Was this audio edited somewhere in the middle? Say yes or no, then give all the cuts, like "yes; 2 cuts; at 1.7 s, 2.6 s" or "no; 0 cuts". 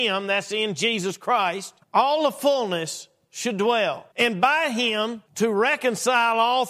yes; 3 cuts; at 1.8 s, 4.1 s, 5.3 s